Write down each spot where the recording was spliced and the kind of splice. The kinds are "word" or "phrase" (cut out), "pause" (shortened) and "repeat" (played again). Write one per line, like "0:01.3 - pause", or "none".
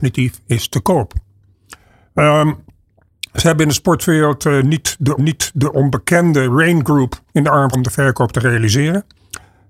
0:05.2 - repeat
0:07.3 - pause
0:07.7 - word

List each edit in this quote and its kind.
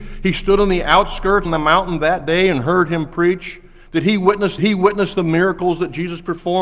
0:01.4 - word
0:04.6 - repeat

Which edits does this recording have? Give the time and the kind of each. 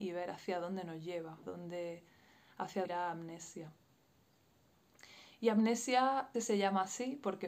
0:01.4 - word
0:02.8 - word
0:06.3 - word

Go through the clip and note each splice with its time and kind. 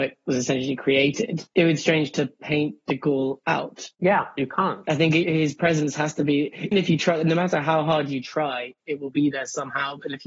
0:01.5 - pause
0:01.8 - word
0:03.9 - pause
0:05.2 - word
0:06.7 - word
0:08.8 - pause

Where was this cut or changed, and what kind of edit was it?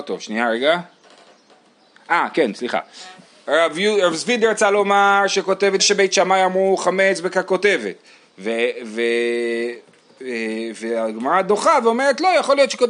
0:05.8 - phrase

